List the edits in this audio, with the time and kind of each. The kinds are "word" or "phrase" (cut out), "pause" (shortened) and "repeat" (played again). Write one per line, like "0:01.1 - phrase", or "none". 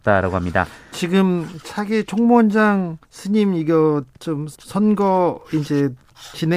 0:01.6 - word
0:03.0 - pause
0:04.5 - pause